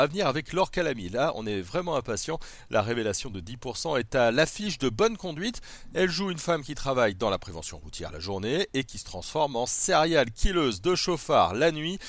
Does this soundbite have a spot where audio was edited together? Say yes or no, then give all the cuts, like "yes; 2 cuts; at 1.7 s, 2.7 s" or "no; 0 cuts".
no; 0 cuts